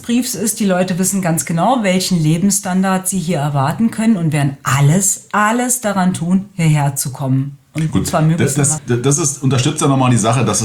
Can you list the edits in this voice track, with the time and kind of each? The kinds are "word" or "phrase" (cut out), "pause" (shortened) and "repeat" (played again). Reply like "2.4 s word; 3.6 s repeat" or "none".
8.8 s word